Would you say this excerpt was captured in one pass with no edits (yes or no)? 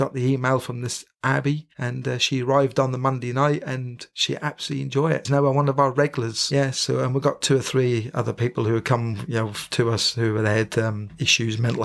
no